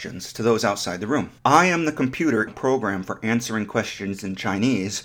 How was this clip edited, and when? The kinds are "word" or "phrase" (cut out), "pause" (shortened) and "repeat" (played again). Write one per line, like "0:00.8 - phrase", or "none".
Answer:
0:01.4 - pause
0:02.5 - word